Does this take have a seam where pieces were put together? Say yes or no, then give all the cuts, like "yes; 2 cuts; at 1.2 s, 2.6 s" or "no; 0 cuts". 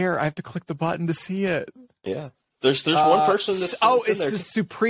no; 0 cuts